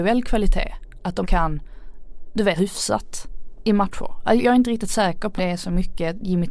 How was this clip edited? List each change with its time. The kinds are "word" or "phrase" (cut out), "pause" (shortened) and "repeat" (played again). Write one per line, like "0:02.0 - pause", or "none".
0:01.2 - word
0:02.6 - word
0:04.4 - word
0:05.4 - word